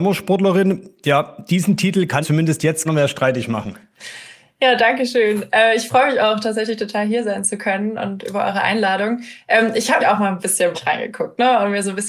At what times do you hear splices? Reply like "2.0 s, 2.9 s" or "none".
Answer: 2.2 s, 2.9 s, 10.0 s, 10.7 s